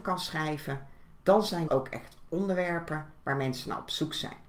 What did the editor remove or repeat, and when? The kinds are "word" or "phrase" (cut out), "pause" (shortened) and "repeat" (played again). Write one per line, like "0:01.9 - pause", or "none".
0:01.7 - word